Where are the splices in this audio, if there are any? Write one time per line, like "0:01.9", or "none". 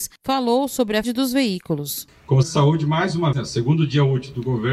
0:01.0
0:02.4
0:03.3